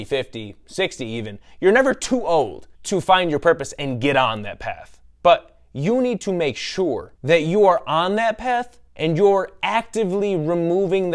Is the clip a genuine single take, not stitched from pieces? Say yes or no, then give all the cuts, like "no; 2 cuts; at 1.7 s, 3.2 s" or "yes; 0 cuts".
no; 4 cuts; at 2.7 s, 5.0 s, 7.2 s, 8.9 s